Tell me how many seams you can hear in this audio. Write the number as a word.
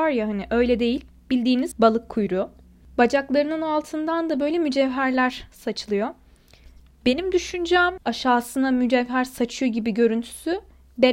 zero